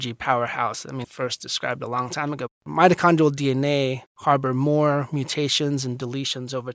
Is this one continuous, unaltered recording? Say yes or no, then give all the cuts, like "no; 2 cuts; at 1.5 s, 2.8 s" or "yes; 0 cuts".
no; 1 cut; at 1.0 s